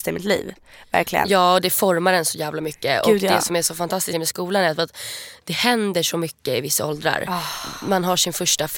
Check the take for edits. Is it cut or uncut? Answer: cut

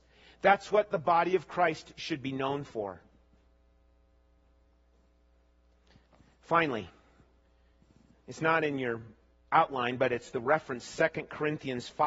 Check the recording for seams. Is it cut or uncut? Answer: uncut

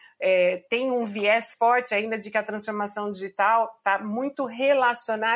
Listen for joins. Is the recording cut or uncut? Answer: uncut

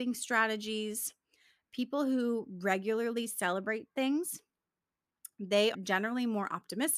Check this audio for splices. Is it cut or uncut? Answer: cut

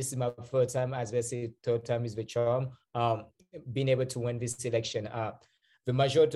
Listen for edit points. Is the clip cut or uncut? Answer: uncut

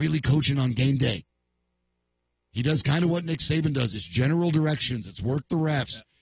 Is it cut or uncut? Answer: uncut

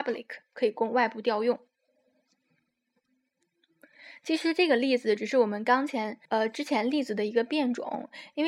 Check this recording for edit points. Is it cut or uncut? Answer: cut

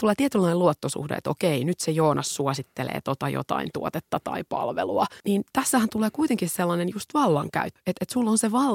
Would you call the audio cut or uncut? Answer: uncut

